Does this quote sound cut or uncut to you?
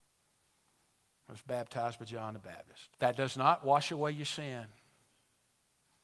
cut